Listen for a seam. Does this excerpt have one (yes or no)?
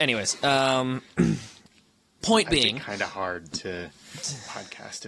no